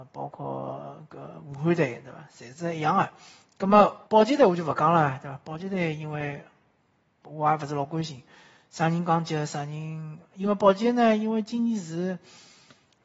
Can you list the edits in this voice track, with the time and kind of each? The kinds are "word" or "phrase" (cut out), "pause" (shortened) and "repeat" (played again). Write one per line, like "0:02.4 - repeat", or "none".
0:04.1 - pause